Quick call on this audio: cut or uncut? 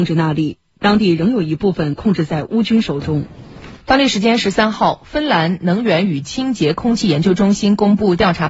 cut